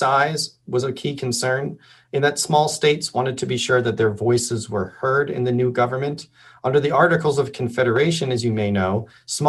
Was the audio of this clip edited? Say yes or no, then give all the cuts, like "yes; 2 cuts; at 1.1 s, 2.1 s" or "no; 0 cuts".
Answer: no; 0 cuts